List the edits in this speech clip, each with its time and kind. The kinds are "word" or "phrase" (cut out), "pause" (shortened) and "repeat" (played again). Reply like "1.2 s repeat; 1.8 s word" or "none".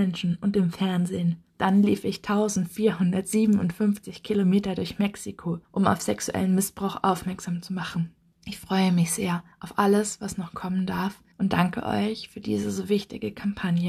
1.5 s pause; 5.6 s pause; 8.3 s pause; 9.5 s pause; 11.3 s pause